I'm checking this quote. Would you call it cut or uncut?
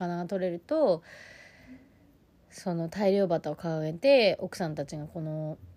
uncut